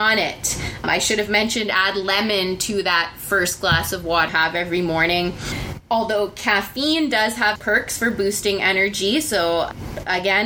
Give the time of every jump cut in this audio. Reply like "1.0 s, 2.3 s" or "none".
4.3 s, 7.6 s